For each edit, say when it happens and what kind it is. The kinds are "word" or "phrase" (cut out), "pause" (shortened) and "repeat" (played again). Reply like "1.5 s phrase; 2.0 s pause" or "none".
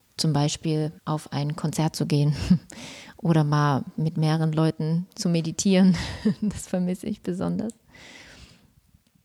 1.0 s pause